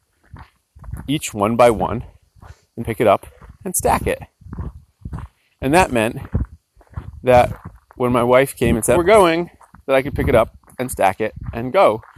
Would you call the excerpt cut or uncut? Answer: cut